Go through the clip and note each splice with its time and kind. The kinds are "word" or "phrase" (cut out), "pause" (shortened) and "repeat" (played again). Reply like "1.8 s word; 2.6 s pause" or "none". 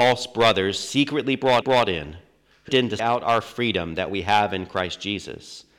1.6 s repeat; 2.7 s word; 3.0 s word

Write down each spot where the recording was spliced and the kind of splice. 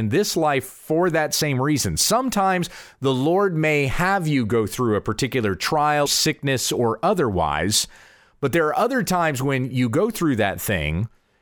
6.1 s word

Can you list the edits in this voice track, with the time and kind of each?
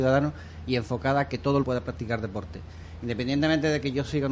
1.6 s word

